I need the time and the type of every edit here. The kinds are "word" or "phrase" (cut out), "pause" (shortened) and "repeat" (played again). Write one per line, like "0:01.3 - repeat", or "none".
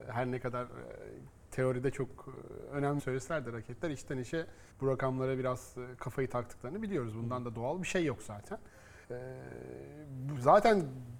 0:03.0 - word
0:04.7 - pause
0:09.0 - pause